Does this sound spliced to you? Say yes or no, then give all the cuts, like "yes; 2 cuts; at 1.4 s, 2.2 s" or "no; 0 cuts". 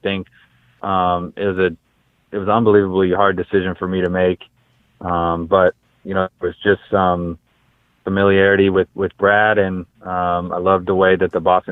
no; 0 cuts